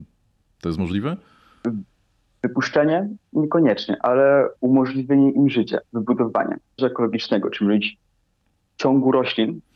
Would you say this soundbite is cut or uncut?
cut